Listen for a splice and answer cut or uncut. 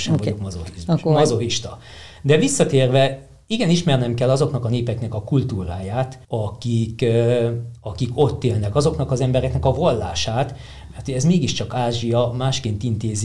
cut